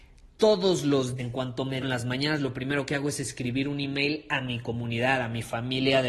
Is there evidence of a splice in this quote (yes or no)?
yes